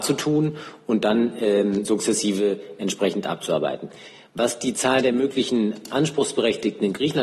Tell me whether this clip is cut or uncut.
uncut